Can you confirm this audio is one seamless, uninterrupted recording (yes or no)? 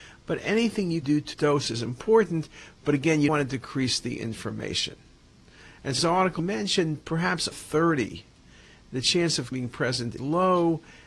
no